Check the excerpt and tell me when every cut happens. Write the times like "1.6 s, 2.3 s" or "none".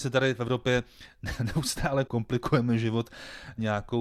none